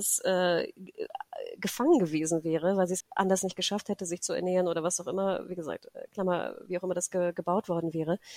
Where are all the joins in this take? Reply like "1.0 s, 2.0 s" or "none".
3.0 s